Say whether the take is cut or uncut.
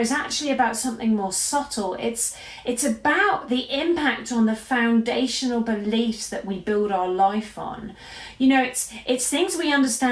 uncut